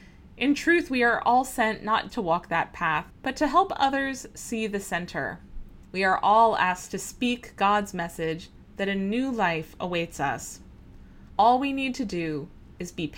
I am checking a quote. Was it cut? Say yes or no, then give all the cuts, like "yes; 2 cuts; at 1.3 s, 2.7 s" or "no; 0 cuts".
yes; 4 cuts; at 2.1 s, 3.1 s, 5.9 s, 11.3 s